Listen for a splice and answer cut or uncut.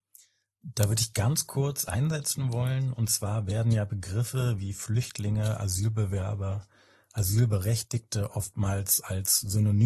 uncut